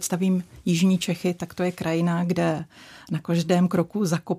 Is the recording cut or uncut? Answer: uncut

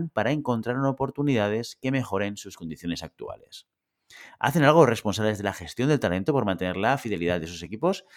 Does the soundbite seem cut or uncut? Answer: uncut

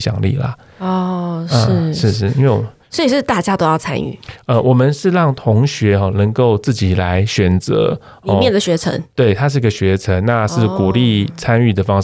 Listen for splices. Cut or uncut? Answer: uncut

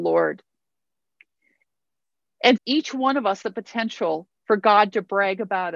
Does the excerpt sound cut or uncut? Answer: cut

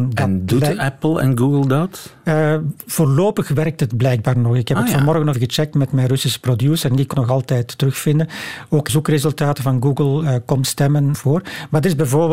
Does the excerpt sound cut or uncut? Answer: cut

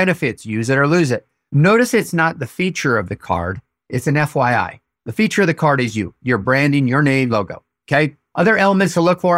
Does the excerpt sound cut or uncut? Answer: cut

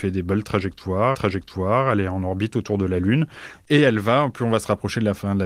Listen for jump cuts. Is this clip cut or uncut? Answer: cut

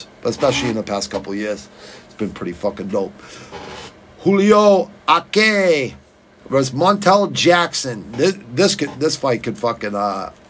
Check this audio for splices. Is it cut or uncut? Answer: uncut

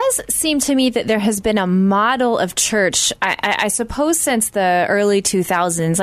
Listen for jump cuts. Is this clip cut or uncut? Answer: uncut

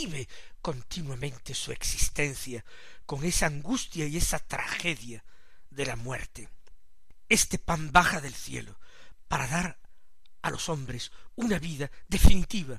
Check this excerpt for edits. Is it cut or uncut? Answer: uncut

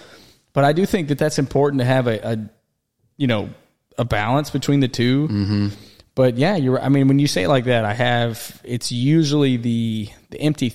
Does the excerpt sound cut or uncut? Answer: uncut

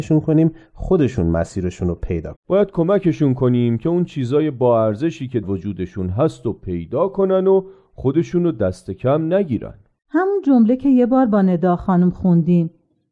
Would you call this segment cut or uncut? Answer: cut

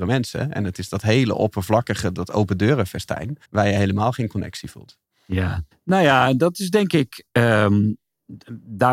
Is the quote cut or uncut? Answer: cut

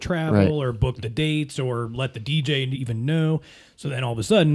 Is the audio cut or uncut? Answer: uncut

